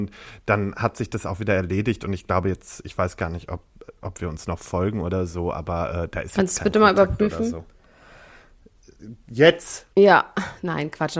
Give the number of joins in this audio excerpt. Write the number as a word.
one